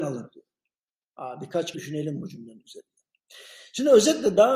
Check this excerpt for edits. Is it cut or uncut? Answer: cut